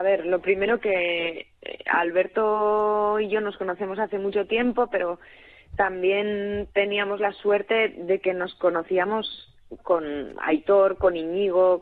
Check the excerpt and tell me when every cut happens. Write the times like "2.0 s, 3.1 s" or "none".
none